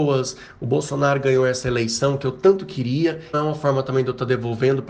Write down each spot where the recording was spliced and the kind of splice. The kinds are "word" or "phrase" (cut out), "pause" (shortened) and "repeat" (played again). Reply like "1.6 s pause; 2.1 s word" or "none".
3.3 s word